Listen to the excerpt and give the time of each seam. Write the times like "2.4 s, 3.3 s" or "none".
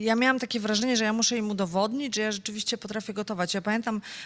none